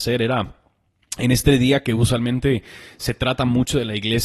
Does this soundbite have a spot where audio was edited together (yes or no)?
no